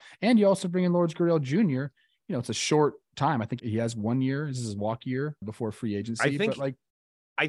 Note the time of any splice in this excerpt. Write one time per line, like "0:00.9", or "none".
0:03.6
0:05.4